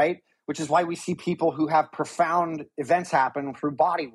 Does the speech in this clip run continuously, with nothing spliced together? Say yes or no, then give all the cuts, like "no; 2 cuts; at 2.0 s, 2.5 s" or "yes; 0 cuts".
yes; 0 cuts